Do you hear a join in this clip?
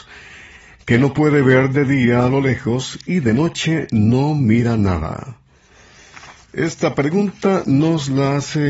no; 0 cuts

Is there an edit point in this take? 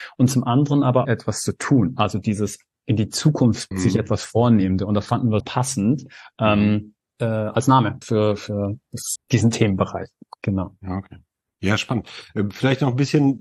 yes; 6 cuts; at 1.0 s, 3.7 s, 5.4 s, 7.0 s, 8.0 s, 9.2 s

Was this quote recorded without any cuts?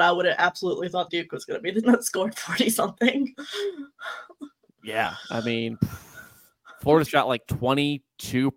no; 3 cuts; at 1.1 s, 1.8 s, 7.1 s

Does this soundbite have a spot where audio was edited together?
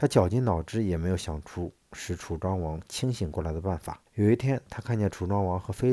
yes; 1 cut; at 4.1 s

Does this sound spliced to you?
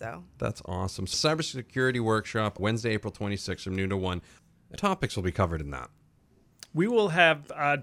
yes; 3 cuts; at 1.1 s, 2.6 s, 4.8 s

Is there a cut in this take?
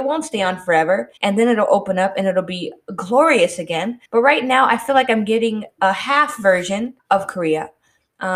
yes; 3 cuts; at 1.2 s, 4.1 s, 7.0 s

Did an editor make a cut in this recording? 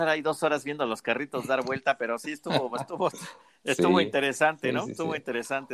no; 0 cuts

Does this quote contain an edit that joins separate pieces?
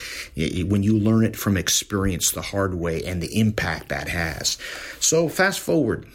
no; 0 cuts

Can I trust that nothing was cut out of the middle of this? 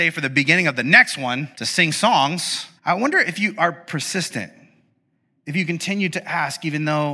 no; 2 cuts; at 1.5 s, 2.8 s

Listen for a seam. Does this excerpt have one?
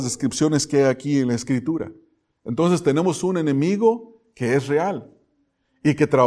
no; 0 cuts

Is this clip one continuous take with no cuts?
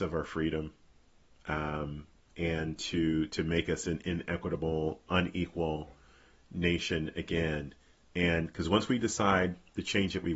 yes; 0 cuts

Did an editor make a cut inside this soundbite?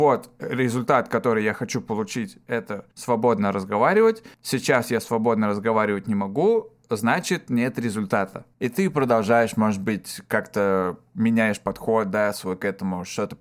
yes; 3 cuts; at 2.9 s, 4.3 s, 8.5 s

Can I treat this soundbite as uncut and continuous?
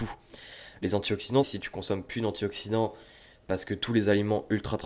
no; 1 cut; at 1.4 s

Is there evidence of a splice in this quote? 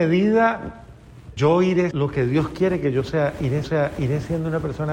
yes; 3 cuts; at 1.4 s, 1.9 s, 3.6 s

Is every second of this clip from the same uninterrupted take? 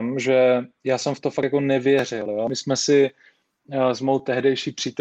yes; 0 cuts

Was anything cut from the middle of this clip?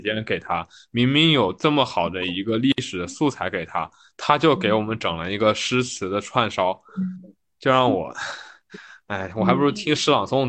no; 0 cuts

